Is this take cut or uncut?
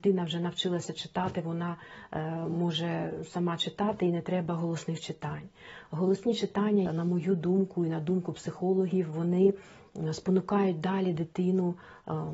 cut